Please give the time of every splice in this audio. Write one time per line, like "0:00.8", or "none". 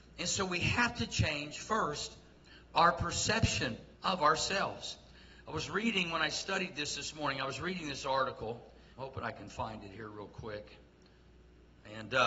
0:04.0
0:08.9